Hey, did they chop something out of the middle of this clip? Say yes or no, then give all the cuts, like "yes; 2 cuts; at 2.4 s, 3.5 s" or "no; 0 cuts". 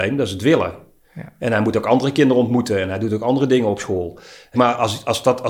yes; 1 cut; at 4.5 s